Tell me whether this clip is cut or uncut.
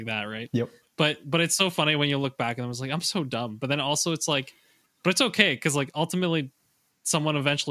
uncut